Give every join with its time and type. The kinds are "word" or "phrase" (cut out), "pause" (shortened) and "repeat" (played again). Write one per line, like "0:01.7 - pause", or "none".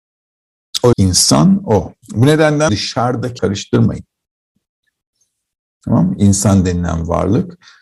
0:00.9 - phrase
0:02.0 - pause
0:02.7 - word
0:03.4 - word